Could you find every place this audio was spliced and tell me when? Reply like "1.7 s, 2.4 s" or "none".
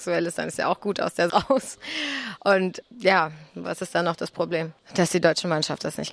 1.3 s